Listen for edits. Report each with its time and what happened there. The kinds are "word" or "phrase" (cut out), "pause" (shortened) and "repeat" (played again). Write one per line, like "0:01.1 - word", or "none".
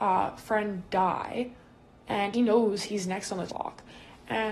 0:02.3 - word
0:03.5 - word